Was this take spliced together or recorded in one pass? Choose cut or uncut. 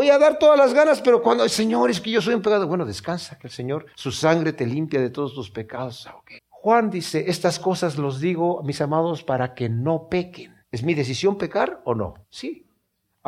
cut